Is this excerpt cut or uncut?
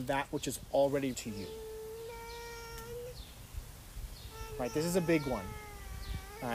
cut